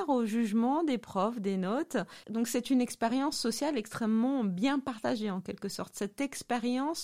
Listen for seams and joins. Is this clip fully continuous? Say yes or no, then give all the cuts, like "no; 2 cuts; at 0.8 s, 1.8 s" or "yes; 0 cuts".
no; 1 cut; at 2.2 s